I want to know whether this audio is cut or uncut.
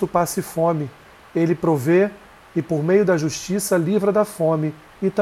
uncut